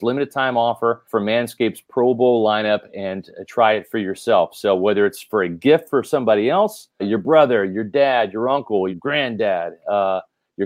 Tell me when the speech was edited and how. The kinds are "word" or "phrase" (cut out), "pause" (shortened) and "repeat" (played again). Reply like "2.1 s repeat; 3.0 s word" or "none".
1.1 s pause; 7.0 s word; 8.9 s word